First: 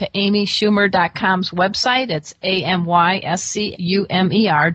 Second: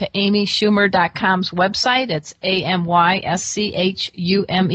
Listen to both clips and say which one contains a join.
first; 1 cut; at 3.7 s

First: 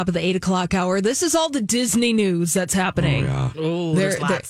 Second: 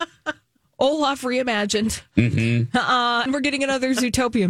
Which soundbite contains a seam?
second; 1 cut; at 3.3 s

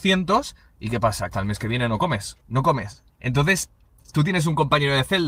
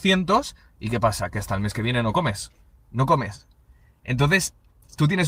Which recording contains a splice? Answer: first; 3 cuts; at 1.3 s, 2.4 s, 3.1 s

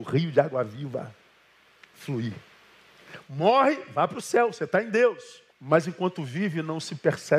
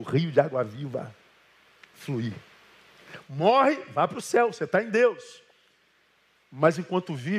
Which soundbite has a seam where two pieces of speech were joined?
first; 1 cut; at 5.5 s

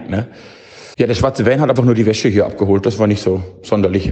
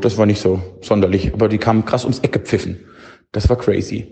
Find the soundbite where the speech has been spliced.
first; 2 cuts; at 0.9 s, 1.8 s

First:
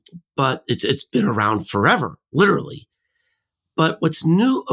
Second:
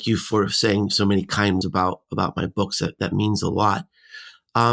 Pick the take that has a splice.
second; 1 cut; at 1.6 s

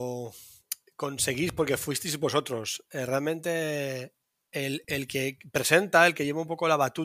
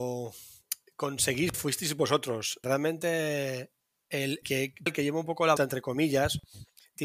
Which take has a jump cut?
second; 5 cuts; at 1.5 s, 2.6 s, 4.4 s, 4.9 s, 5.6 s

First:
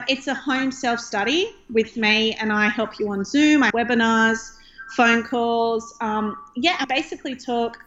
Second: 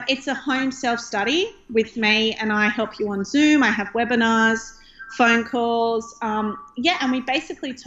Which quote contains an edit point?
first; 2 cuts; at 3.7 s, 6.8 s

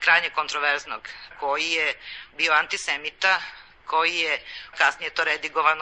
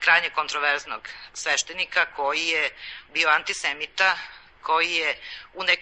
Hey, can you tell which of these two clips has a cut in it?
first; 2 cuts; at 1.3 s, 4.7 s

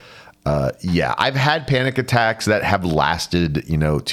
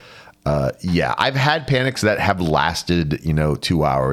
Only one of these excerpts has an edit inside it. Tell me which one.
second; 1 cut; at 1.9 s

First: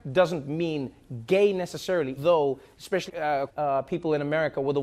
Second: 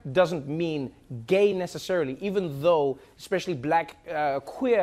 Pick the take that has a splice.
first; 3 cuts; at 2.2 s, 3.1 s, 3.5 s

